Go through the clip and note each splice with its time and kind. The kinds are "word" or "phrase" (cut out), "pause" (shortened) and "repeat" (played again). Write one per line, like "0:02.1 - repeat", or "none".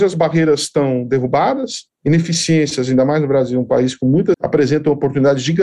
0:04.3 - word